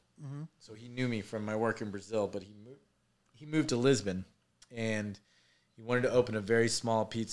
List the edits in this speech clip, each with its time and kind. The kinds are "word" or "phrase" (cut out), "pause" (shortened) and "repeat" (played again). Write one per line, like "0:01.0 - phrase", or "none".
none